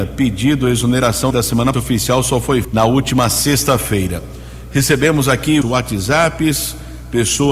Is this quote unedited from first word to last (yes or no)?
no